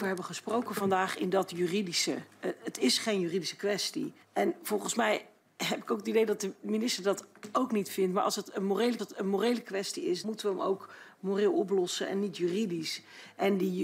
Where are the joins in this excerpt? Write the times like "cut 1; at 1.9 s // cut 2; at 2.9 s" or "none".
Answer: cut 1; at 4.2 s // cut 2; at 9.0 s // cut 3; at 10.2 s